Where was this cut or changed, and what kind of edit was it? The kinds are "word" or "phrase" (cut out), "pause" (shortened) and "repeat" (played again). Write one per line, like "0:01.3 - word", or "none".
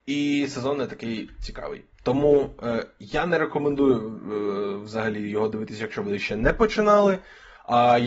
0:01.9 - pause